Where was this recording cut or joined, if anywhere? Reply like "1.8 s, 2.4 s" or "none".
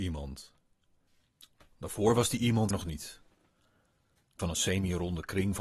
2.7 s, 4.4 s